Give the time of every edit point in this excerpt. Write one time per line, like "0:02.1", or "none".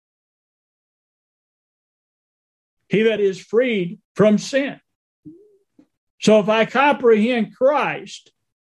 0:03.2
0:04.0
0:06.7